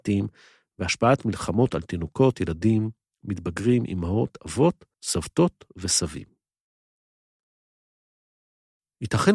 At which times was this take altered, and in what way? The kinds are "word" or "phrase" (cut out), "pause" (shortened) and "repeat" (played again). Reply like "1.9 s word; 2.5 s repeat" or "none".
4.9 s pause